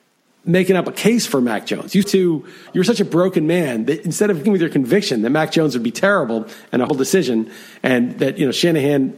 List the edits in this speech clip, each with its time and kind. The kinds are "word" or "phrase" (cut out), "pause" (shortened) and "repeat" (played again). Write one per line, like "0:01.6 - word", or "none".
0:02.0 - word
0:04.4 - word
0:06.9 - word